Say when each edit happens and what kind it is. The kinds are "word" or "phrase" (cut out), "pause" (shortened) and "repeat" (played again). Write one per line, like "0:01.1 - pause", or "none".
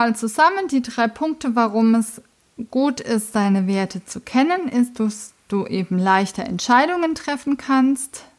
none